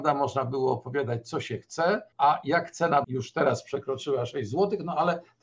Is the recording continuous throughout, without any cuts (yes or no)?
no